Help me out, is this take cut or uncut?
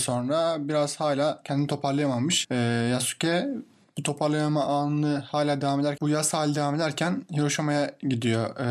uncut